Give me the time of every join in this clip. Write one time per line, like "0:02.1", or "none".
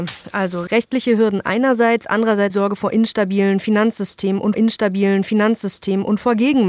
0:02.5
0:04.5